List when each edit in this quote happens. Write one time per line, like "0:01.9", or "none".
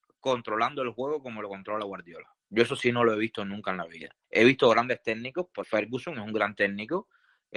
0:02.4
0:04.2
0:05.6